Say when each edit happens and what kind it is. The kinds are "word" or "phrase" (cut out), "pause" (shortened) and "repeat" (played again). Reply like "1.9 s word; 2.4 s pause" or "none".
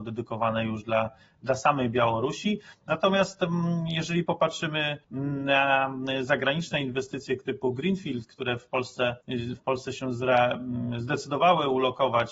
5.0 s pause; 9.2 s pause